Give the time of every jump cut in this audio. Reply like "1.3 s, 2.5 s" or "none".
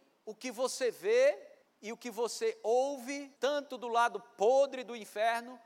1.6 s, 3.4 s